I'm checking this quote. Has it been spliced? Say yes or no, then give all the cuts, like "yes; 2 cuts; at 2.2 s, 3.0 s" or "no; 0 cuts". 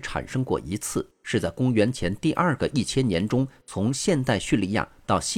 no; 0 cuts